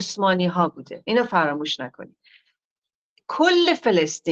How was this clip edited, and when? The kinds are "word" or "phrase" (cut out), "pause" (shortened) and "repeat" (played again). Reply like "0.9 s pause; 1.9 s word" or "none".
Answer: none